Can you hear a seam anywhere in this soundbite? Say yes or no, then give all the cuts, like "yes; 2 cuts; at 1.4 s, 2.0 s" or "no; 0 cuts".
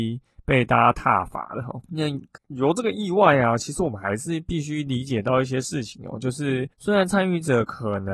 yes; 2 cuts; at 1.9 s, 6.7 s